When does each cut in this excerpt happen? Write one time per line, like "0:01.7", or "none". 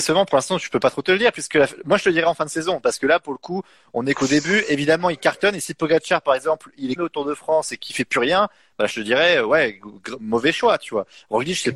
0:07.0